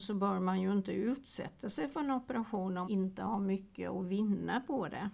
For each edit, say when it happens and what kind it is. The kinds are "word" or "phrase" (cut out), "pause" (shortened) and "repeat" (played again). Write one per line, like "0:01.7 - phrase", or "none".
0:02.8 - word